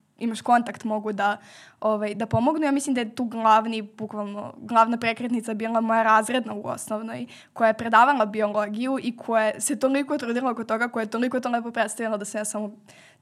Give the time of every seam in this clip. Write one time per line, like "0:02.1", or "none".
none

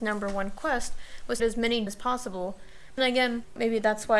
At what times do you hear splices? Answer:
0:01.4
0:01.9
0:03.0

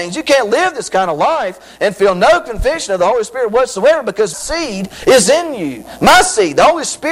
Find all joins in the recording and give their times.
0:04.3

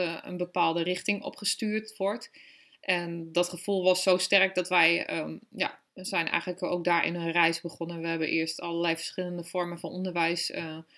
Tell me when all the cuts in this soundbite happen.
0:05.9

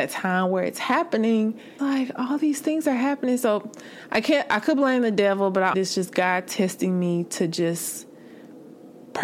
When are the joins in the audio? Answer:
0:01.8
0:05.7

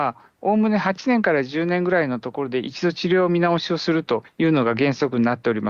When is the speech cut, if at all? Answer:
none

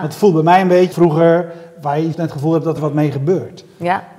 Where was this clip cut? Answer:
0:00.9
0:02.1
0:02.8

